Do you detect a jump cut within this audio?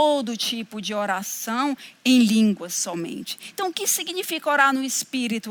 no; 0 cuts

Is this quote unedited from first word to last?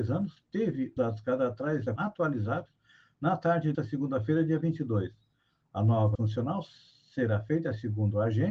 no; 4 cuts; at 1.0 s, 2.0 s, 3.7 s, 6.1 s

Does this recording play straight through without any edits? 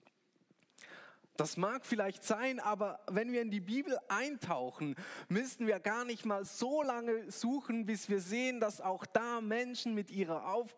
yes; 0 cuts

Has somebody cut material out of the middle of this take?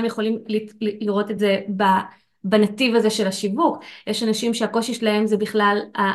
no; 0 cuts

